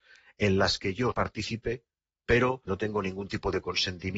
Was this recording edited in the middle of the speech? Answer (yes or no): yes